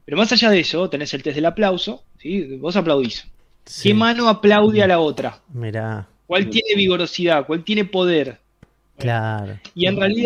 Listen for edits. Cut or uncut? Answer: uncut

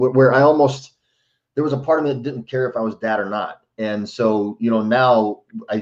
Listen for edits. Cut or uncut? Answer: uncut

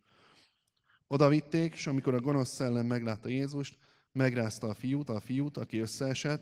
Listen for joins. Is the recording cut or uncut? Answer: cut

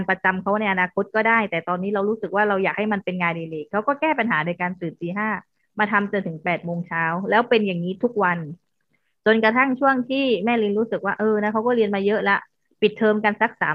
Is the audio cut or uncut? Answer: uncut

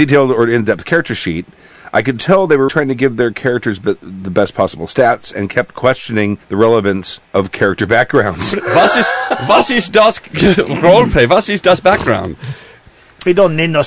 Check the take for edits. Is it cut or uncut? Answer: cut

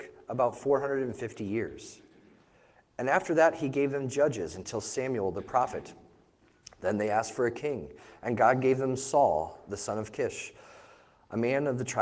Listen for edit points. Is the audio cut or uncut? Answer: uncut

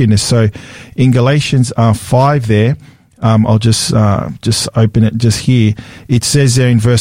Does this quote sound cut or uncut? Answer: uncut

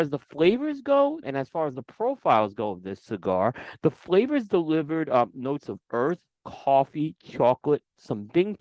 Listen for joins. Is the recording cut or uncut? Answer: cut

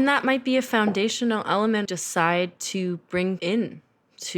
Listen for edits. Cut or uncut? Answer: cut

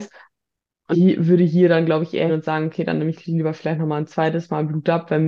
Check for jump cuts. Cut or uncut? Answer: cut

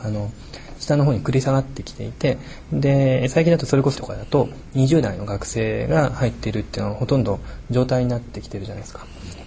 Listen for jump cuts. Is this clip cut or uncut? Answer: cut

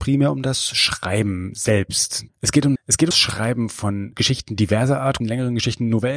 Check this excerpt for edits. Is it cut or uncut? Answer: cut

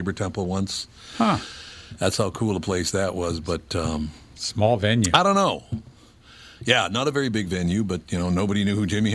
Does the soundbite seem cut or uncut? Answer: uncut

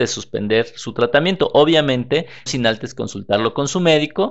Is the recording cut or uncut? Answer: cut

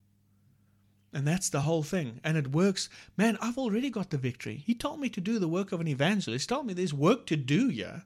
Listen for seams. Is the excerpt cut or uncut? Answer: uncut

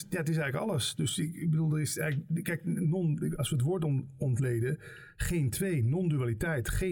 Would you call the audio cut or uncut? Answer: uncut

